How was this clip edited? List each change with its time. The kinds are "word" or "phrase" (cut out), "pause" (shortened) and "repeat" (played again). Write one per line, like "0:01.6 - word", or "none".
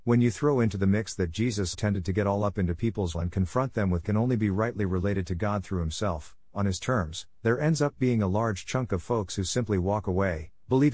0:01.7 - word
0:03.1 - word
0:04.0 - phrase